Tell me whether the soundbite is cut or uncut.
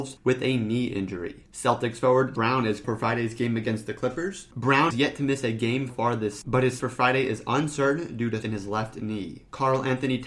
cut